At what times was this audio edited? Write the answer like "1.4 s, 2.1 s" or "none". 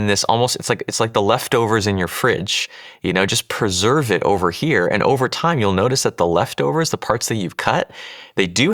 none